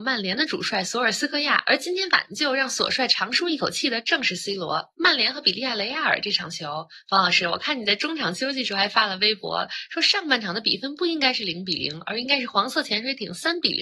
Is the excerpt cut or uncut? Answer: uncut